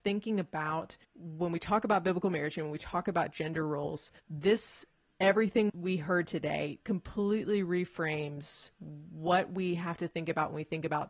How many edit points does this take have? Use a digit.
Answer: 3